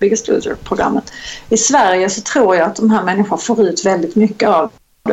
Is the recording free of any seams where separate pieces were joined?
yes; 0 cuts

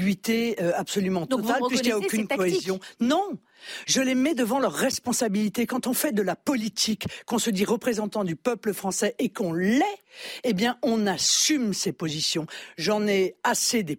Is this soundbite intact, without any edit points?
yes; 0 cuts

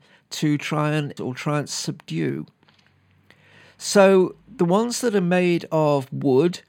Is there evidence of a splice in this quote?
yes; 2 cuts; at 1.2 s, 4.4 s

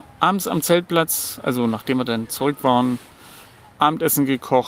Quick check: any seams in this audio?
no; 0 cuts

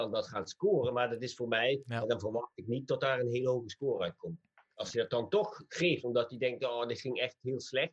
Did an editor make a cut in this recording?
no; 0 cuts

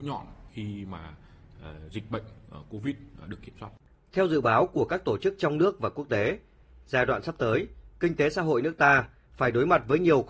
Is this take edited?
no; 0 cuts

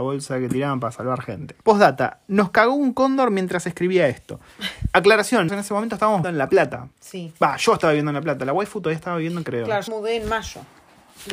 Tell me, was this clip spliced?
yes; 6 cuts; at 1.6 s, 5.5 s, 6.2 s, 6.9 s, 9.4 s, 9.9 s

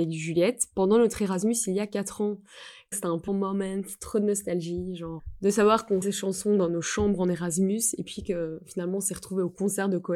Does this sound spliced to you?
yes; 3 cuts; at 2.9 s, 3.3 s, 6.0 s

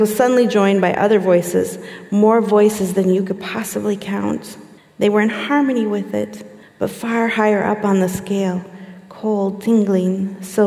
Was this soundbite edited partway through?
yes; 2 cuts; at 4.8 s, 6.6 s

